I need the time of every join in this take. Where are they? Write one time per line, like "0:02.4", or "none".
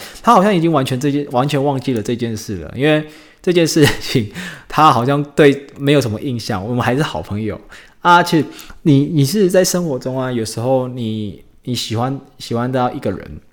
none